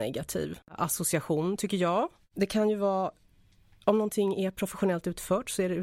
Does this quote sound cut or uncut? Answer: uncut